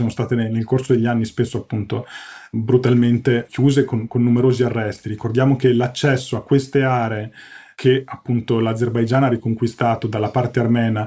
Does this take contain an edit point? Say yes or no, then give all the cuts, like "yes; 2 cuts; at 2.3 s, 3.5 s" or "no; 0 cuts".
no; 0 cuts